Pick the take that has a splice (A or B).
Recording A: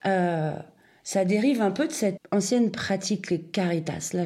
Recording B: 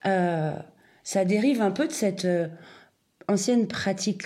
A